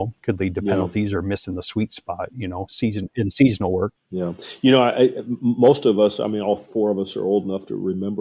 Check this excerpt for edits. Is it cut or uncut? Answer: uncut